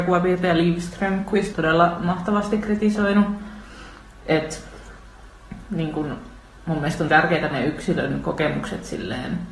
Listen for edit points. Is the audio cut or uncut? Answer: cut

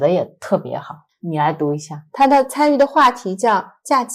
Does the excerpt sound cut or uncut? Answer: cut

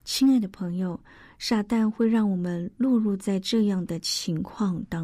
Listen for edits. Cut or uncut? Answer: uncut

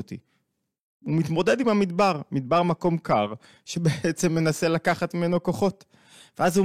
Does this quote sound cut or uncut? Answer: uncut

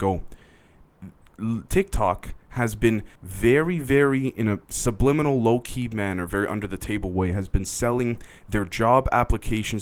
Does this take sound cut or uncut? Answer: cut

